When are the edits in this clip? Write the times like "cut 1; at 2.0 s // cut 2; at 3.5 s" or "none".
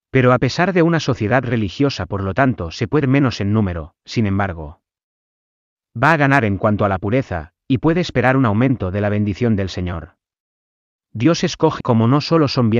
cut 1; at 3.0 s // cut 2; at 11.8 s